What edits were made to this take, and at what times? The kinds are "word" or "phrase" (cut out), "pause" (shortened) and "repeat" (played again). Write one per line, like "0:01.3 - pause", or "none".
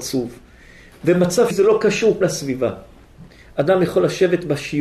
0:01.5 - word
0:02.2 - word